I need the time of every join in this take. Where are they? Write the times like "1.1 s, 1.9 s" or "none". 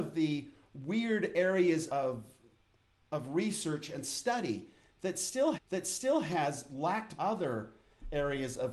1.9 s, 5.5 s, 7.2 s